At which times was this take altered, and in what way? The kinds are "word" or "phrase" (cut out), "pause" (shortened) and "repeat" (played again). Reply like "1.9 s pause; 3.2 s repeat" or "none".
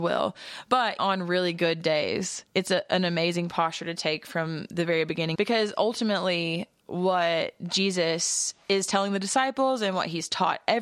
1.0 s word; 5.3 s phrase